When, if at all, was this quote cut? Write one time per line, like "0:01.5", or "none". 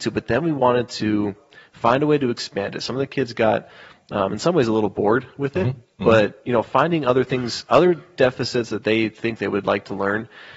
none